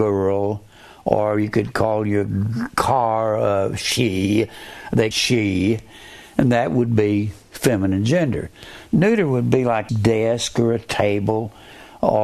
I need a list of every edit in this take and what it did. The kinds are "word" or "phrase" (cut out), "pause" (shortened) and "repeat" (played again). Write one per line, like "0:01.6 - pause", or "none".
0:05.1 - phrase
0:09.9 - word

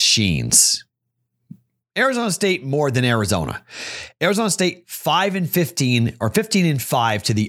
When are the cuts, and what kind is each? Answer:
none

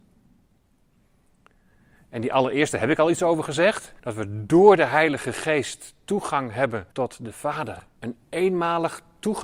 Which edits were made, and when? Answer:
0:04.0 - pause
0:06.9 - pause
0:08.0 - pause

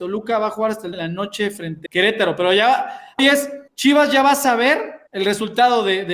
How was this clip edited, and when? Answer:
0:00.9 - word
0:01.9 - word
0:03.2 - phrase
0:03.7 - pause
0:05.1 - pause

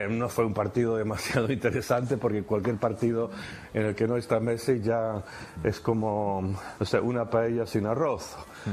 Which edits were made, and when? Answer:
0:06.8 - word

